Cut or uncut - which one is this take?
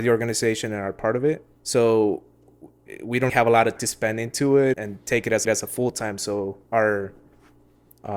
cut